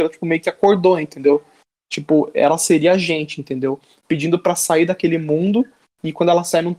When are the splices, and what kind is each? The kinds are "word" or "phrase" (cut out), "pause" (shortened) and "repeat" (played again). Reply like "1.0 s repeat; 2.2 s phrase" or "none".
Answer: none